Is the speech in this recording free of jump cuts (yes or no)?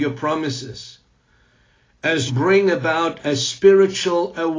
no